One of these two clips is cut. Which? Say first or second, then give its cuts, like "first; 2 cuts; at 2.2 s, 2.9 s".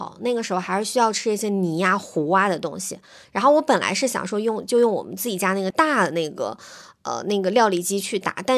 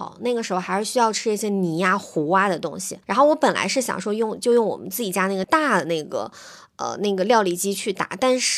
second; 1 cut; at 3.0 s